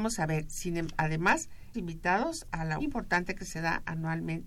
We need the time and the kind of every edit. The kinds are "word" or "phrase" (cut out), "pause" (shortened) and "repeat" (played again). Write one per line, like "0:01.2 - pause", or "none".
0:01.7 - word
0:02.8 - phrase